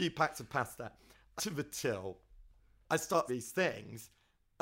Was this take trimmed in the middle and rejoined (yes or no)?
yes